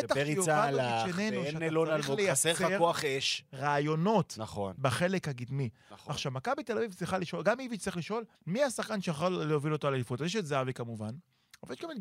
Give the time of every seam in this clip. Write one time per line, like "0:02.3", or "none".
0:08.3